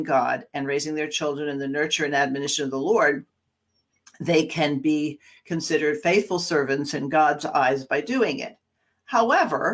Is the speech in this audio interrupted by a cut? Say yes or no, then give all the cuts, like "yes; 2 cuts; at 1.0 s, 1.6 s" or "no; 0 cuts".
no; 0 cuts